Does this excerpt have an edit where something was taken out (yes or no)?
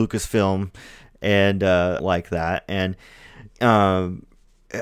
yes